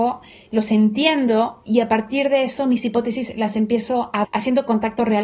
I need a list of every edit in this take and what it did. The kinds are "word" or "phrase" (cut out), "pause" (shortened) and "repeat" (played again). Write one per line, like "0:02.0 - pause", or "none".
0:04.2 - word

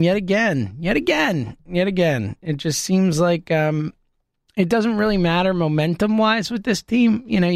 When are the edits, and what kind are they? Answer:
none

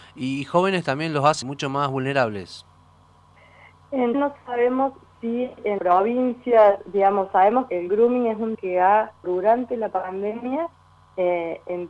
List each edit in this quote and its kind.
0:01.4 - word
0:04.1 - word
0:05.8 - word
0:07.7 - word
0:08.5 - word
0:09.2 - word

